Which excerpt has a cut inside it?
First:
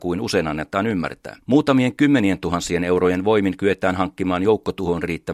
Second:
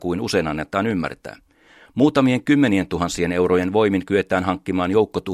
first; 1 cut; at 1.4 s

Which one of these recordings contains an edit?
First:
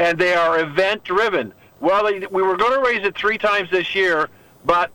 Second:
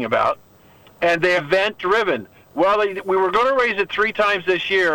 second; 1 cut; at 1.4 s

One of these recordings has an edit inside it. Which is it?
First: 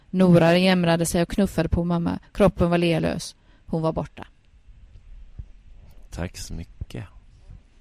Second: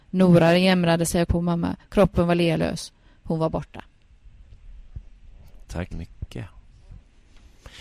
second; 2 cuts; at 1.3 s, 5.9 s

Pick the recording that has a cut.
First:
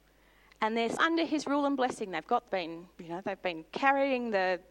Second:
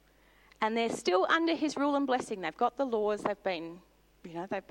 first; 4 cuts; at 1.0 s, 2.5 s, 2.9 s, 3.7 s

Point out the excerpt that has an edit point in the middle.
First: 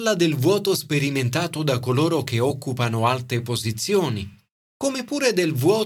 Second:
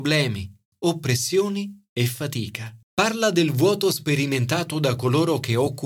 second; 1 cut; at 2.8 s

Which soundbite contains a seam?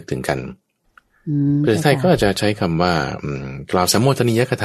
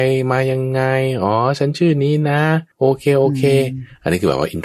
second; 1 cut; at 2.7 s

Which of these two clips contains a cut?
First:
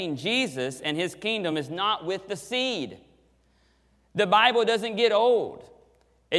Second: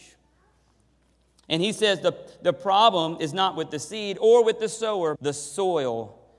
second; 1 cut; at 5.2 s

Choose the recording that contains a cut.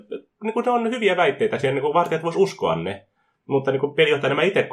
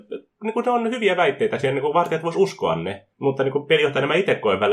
second; 1 cut; at 3.1 s

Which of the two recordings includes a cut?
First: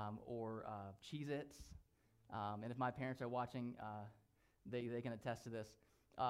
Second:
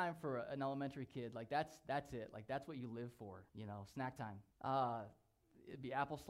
second; 2 cuts; at 3.5 s, 4.5 s

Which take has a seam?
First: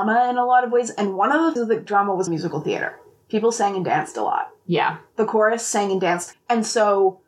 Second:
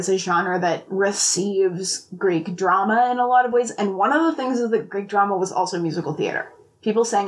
first; 4 cuts; at 1.6 s, 1.9 s, 2.3 s, 6.3 s

